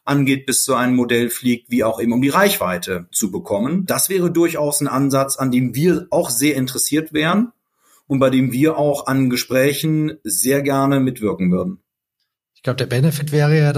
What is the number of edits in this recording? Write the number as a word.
zero